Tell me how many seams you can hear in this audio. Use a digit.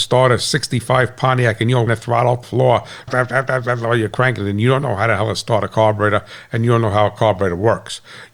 3